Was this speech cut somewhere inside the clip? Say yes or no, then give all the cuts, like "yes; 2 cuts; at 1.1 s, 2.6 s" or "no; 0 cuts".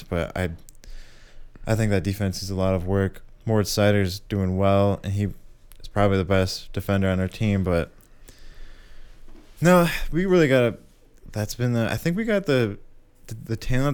no; 0 cuts